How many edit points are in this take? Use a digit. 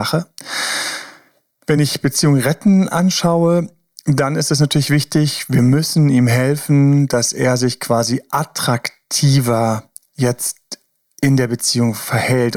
0